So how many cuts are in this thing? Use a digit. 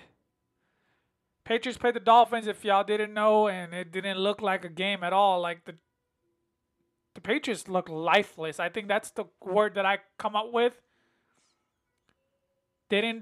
0